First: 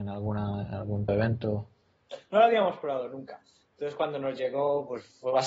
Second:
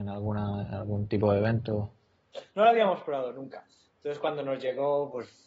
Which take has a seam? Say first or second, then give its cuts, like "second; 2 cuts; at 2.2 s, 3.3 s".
first; 1 cut; at 1.1 s